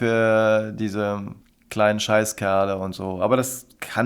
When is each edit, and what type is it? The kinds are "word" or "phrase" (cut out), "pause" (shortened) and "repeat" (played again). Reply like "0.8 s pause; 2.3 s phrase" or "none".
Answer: 1.4 s pause